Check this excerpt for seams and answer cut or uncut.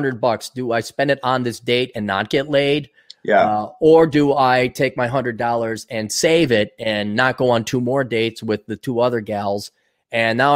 uncut